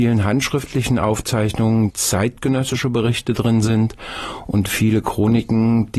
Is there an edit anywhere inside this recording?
yes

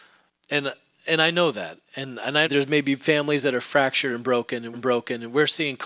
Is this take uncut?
no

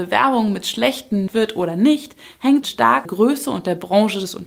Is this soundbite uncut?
no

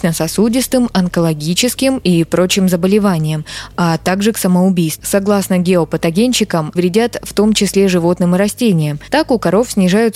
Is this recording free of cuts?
no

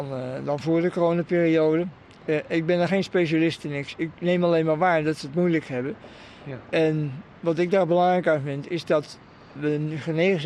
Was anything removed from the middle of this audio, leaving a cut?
no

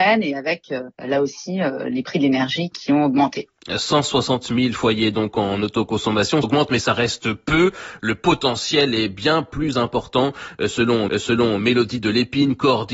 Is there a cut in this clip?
yes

